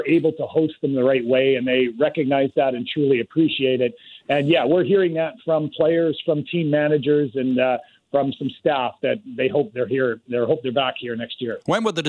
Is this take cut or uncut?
uncut